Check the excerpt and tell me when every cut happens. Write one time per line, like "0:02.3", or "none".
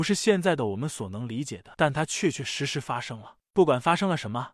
0:01.7